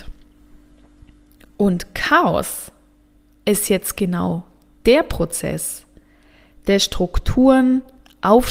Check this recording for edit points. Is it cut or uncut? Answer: uncut